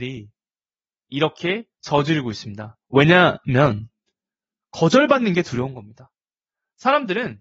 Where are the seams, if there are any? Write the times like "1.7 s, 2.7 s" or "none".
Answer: 1.7 s